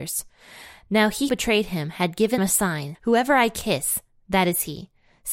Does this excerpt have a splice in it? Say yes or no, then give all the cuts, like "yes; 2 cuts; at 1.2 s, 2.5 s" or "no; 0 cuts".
yes; 3 cuts; at 1.3 s, 2.4 s, 2.9 s